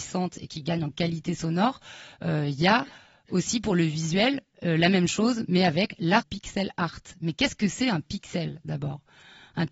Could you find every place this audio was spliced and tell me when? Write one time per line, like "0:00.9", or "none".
0:06.2